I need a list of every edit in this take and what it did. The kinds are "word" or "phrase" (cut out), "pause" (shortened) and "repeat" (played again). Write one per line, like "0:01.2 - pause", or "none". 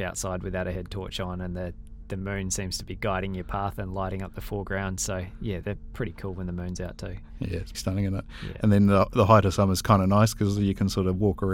0:07.7 - word